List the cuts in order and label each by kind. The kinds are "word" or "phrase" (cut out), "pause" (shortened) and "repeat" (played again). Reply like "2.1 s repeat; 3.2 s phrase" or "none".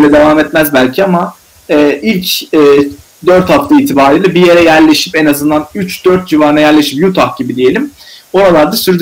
none